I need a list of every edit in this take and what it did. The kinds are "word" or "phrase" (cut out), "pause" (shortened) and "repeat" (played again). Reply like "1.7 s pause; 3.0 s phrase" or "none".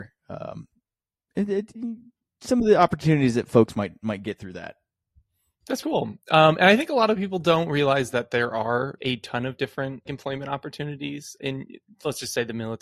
5.8 s word; 9.0 s word; 10.0 s word; 11.4 s word